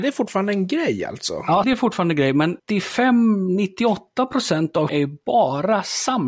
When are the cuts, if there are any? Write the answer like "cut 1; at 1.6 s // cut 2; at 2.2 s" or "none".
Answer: cut 1; at 1.6 s // cut 2; at 2.6 s // cut 3; at 4.9 s